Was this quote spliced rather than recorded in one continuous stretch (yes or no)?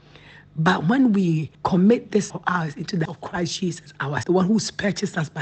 yes